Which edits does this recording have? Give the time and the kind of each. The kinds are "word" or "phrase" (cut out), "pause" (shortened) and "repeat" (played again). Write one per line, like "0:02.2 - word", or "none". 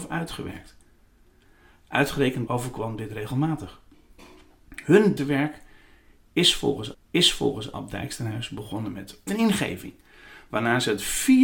0:02.5 - phrase
0:05.2 - word
0:06.9 - repeat
0:09.3 - phrase